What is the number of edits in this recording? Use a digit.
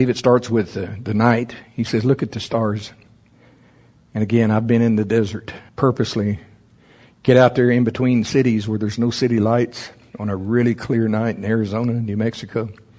1